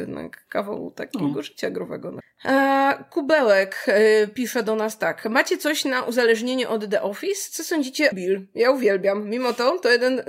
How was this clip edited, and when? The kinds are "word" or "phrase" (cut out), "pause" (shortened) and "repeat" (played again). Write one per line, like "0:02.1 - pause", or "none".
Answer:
0:08.1 - phrase